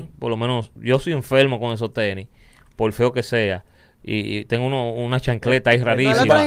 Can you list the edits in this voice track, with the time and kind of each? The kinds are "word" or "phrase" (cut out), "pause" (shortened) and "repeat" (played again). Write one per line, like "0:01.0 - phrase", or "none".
none